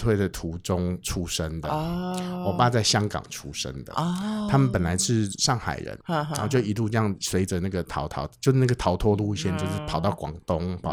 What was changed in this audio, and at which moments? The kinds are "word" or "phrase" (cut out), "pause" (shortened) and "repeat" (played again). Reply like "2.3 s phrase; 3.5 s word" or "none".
6.0 s pause